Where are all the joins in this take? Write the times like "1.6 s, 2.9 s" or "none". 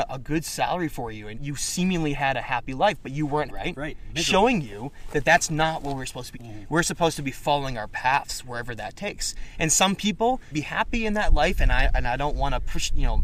1.3 s, 3.5 s, 6.3 s, 10.5 s